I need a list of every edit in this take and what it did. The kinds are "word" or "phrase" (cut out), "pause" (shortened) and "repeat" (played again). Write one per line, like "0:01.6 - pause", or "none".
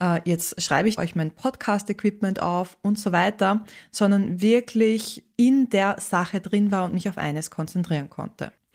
0:01.0 - phrase
0:05.3 - pause